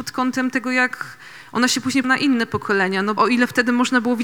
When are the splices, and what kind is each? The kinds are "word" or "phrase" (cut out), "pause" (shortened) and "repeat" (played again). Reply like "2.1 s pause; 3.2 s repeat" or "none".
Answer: 2.0 s word; 3.2 s word